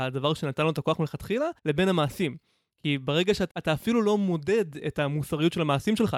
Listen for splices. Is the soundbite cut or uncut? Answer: cut